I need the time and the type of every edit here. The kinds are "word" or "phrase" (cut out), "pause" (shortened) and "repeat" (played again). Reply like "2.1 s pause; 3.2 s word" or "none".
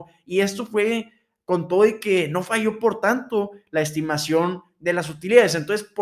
none